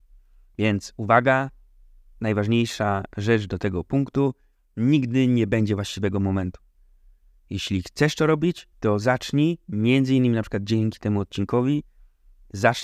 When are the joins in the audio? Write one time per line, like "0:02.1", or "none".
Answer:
0:08.7